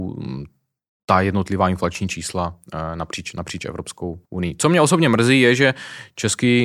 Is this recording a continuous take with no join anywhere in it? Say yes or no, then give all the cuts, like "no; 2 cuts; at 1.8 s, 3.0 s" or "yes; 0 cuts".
no; 1 cut; at 4.2 s